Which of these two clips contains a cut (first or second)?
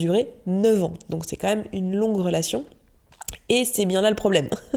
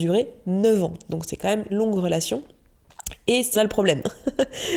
second